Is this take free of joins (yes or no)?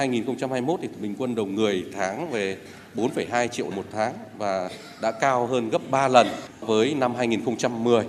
no